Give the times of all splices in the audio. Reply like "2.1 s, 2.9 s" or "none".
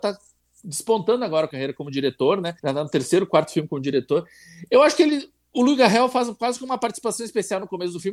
1.5 s, 2.6 s